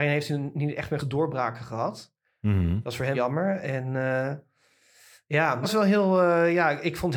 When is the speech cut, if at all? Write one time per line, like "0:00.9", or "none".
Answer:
0:01.0
0:03.1
0:05.6